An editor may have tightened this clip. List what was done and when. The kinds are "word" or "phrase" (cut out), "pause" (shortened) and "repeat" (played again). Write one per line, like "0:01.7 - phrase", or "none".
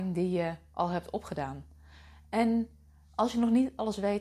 none

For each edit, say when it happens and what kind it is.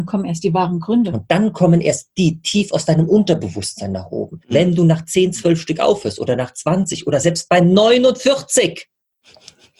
0:04.4 - pause

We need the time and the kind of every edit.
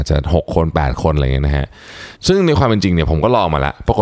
0:02.2 - pause

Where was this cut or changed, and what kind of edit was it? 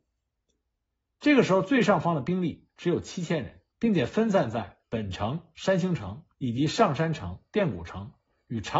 0:03.7 - pause
0:04.8 - pause
0:06.3 - pause
0:07.5 - pause

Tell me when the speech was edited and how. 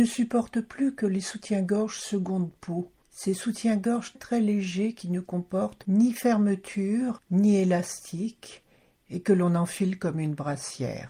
0:04.2 - word

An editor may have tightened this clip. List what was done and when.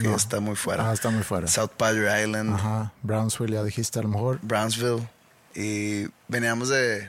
none

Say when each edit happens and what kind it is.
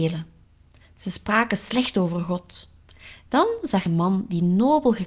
0:03.9 - word

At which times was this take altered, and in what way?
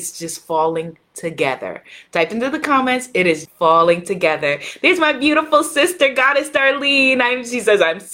0:03.4 - word

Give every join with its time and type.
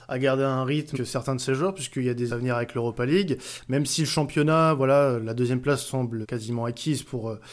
0:00.9 - word
0:02.3 - word
0:06.2 - word

